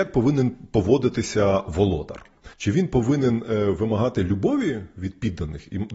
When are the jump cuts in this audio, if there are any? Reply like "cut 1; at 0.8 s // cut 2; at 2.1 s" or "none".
cut 1; at 2.5 s